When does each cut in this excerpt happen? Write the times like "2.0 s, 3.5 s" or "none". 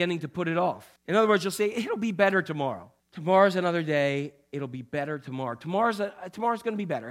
1.0 s, 3.0 s